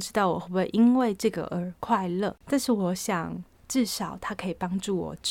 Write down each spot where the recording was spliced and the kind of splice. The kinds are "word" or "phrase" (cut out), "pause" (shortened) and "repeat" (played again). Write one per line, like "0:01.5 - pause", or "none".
0:02.4 - pause